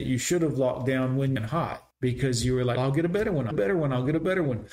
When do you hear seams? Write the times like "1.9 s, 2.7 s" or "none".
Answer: 1.4 s, 1.9 s, 2.8 s, 3.5 s

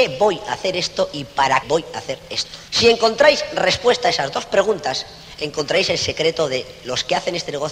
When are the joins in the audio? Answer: 1.6 s, 2.7 s

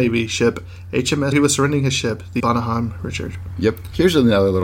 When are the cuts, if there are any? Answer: 1.3 s, 2.4 s

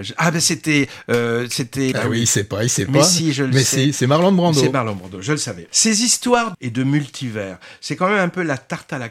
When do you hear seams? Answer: 1.9 s, 5.7 s, 6.5 s

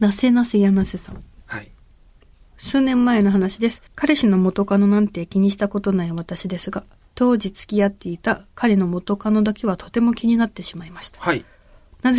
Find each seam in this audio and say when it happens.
3.9 s

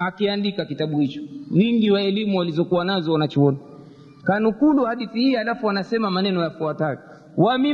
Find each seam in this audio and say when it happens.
none

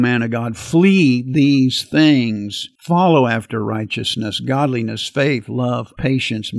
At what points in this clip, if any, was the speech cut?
2.8 s

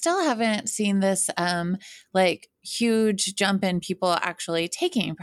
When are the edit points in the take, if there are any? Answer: 2.5 s

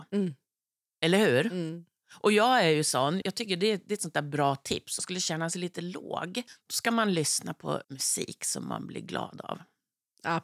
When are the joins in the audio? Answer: 3.2 s, 5.0 s, 6.5 s, 7.8 s

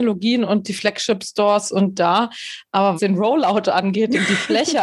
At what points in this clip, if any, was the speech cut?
1.9 s, 3.0 s

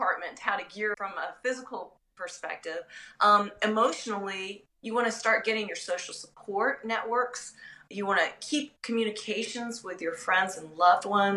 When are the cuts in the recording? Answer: 0.9 s

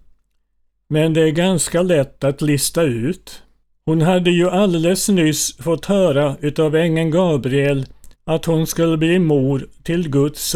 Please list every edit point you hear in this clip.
3.6 s, 8.1 s

